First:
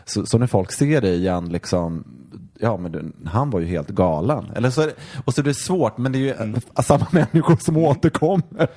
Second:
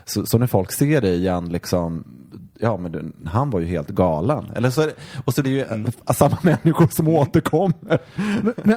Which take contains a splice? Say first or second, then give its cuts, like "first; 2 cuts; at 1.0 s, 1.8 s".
second; 1 cut; at 5.4 s